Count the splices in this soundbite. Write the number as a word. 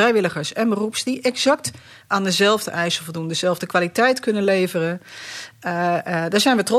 zero